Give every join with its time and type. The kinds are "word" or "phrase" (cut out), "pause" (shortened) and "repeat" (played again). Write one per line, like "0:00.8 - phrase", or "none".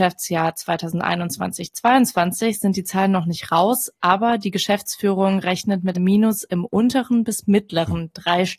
0:05.9 - word